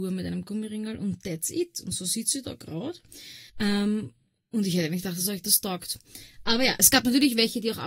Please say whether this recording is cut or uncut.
cut